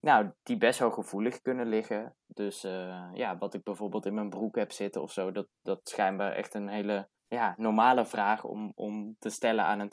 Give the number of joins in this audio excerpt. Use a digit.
1